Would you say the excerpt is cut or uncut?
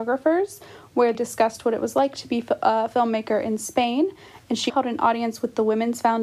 cut